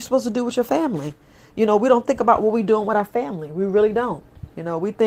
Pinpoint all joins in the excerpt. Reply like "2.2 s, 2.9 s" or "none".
none